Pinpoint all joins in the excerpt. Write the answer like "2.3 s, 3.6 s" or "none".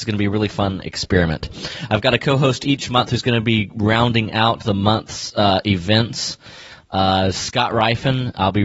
none

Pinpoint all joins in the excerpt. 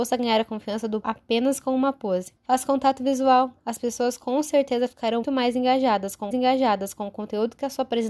1.0 s, 2.4 s, 3.6 s, 5.2 s, 6.3 s

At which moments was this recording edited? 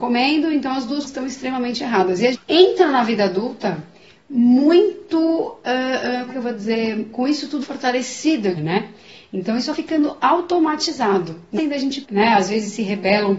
1.1 s, 2.3 s, 6.3 s, 7.6 s, 8.5 s, 9.7 s, 11.6 s, 12.0 s

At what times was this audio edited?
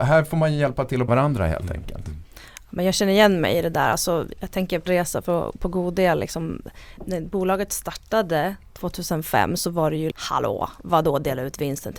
1.1 s, 4.9 s, 7.0 s, 10.1 s

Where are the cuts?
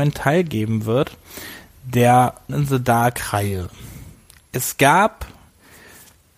2.5 s

